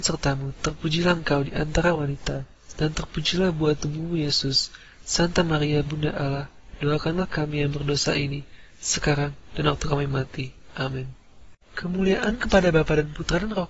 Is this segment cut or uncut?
uncut